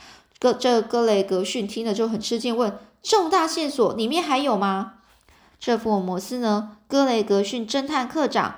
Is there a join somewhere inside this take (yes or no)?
no